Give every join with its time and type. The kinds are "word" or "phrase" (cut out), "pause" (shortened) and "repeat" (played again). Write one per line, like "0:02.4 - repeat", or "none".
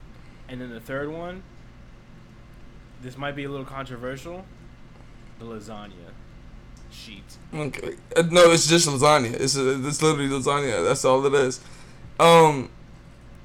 0:05.3 - pause
0:07.4 - pause

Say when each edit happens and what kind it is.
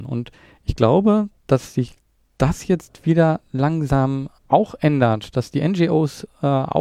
0:04.4 - pause

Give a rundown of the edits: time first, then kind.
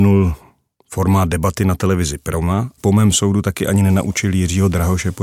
0:02.8 - phrase

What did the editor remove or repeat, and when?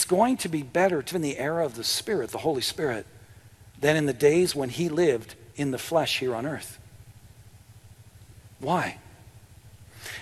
0:01.1 - word

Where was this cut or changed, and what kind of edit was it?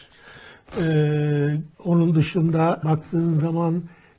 0:01.7 - pause
0:02.8 - word

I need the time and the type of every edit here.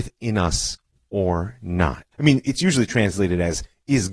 0:02.1 - pause

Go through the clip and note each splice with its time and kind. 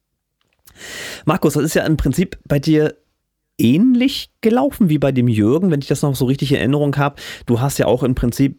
none

